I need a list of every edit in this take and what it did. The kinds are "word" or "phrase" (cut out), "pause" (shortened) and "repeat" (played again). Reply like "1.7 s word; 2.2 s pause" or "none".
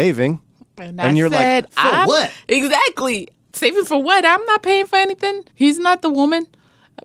5.5 s pause